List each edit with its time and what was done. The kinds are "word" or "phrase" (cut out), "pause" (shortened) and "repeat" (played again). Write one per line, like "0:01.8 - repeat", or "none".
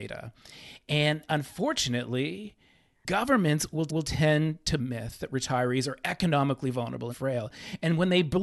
0:03.9 - repeat
0:04.8 - phrase
0:07.1 - phrase